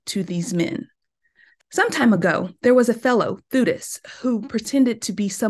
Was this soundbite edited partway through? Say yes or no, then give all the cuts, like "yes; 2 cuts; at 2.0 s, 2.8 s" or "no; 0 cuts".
no; 0 cuts